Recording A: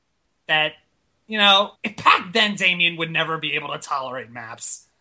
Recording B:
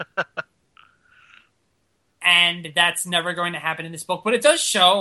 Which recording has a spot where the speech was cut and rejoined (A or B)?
A